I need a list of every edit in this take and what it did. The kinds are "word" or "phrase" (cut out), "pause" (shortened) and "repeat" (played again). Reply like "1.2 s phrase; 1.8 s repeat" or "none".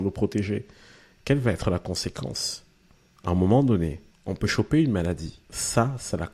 2.9 s pause; 4.1 s pause; 5.4 s pause

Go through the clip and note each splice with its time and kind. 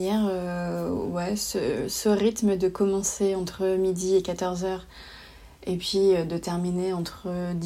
none

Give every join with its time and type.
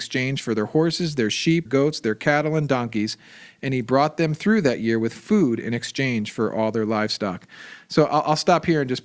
1.7 s word

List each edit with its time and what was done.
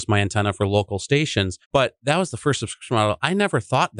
1.6 s pause

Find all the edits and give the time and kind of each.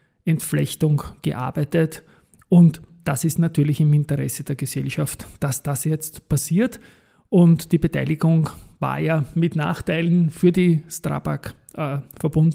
none

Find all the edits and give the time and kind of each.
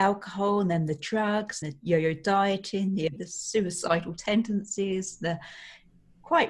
1.6 s word; 3.2 s word

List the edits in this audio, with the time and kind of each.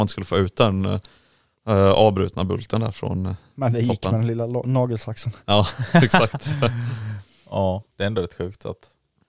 7.9 s pause

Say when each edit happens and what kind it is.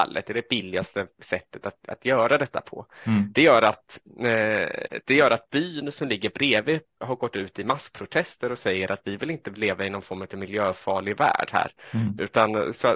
none

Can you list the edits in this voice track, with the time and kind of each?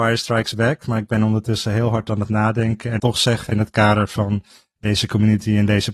3.0 s phrase; 3.5 s word

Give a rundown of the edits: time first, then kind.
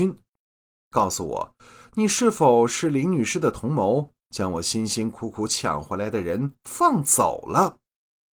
none

